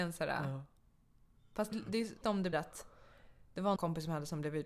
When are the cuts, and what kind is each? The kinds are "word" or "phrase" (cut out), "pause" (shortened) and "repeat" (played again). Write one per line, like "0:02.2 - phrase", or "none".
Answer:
0:01.7 - word
0:02.2 - word
0:02.5 - word
0:03.8 - word